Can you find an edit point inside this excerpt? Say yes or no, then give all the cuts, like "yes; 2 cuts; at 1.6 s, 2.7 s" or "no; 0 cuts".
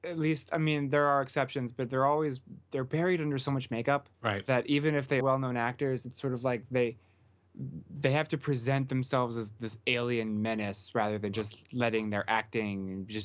yes; 2 cuts; at 4.1 s, 5.2 s